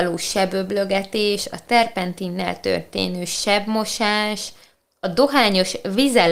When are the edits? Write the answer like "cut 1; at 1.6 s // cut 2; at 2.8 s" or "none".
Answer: none